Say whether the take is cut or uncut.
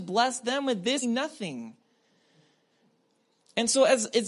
cut